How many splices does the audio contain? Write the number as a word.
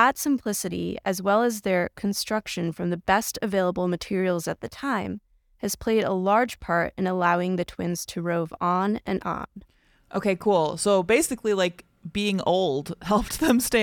zero